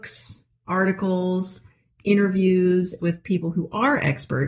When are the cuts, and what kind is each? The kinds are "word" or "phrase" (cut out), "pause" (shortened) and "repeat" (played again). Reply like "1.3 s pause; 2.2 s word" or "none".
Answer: 3.0 s phrase